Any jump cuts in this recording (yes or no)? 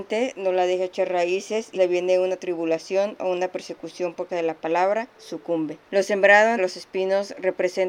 yes